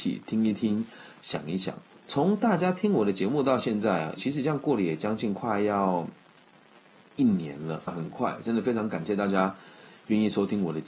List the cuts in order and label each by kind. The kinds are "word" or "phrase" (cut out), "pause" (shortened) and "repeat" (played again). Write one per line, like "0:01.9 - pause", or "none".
0:04.2 - word
0:07.9 - word